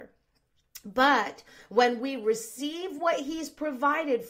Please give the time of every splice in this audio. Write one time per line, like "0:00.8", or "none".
none